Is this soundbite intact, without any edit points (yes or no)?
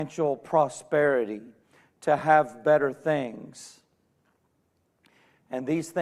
yes